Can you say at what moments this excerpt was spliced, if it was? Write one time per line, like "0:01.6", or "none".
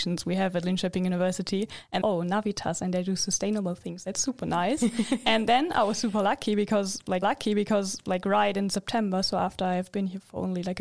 0:02.0
0:07.2

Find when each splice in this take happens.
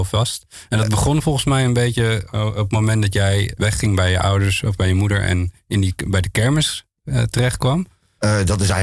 0:03.6

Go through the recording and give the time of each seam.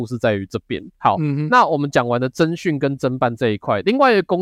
0:00.9

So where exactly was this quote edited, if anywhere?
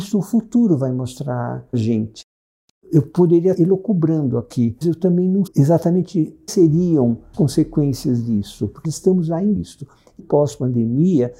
0:01.7
0:03.5
0:04.8
0:05.5
0:06.5
0:07.3
0:08.8
0:09.6
0:10.2

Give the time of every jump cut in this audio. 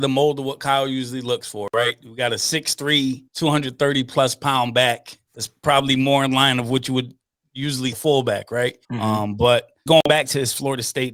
0:03.3
0:05.3
0:07.9
0:08.8
0:09.9

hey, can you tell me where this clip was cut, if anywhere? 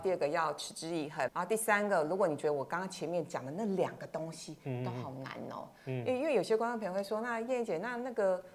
0:01.3

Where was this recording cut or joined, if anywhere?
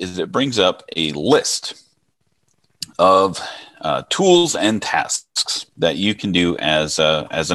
0:05.7

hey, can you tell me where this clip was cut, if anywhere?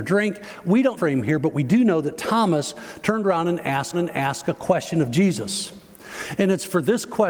0:01.0
0:03.9

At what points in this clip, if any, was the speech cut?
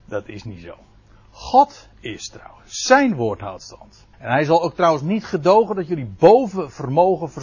0:04.1

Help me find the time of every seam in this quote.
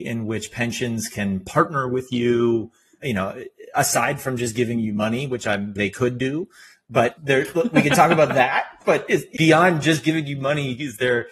0:03.0
0:05.8
0:07.2
0:09.4

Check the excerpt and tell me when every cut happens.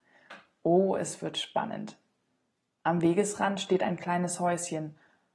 none

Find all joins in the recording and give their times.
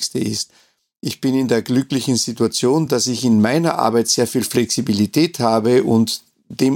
none

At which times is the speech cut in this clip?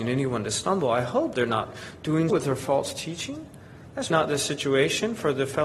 0:01.3
0:02.3
0:04.1

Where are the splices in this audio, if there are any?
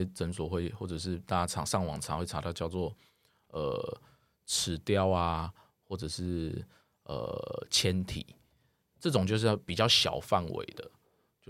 0:08.9

